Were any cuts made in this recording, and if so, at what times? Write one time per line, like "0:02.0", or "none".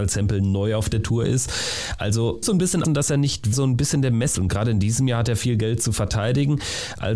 0:02.4
0:02.8
0:03.5
0:04.3